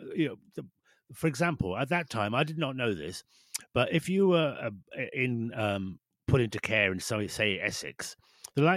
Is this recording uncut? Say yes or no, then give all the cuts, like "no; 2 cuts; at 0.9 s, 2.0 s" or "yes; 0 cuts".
yes; 0 cuts